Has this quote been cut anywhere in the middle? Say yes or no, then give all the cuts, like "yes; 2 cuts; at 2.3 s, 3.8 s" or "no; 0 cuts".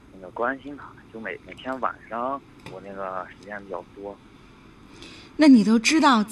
no; 0 cuts